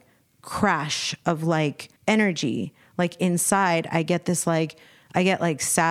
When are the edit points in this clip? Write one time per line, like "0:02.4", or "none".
0:02.0